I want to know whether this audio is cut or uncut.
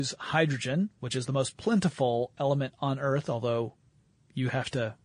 uncut